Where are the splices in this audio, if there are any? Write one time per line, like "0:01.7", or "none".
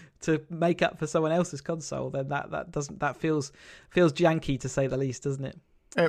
none